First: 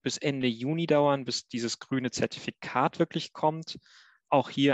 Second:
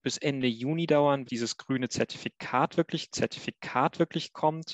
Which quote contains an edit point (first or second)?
second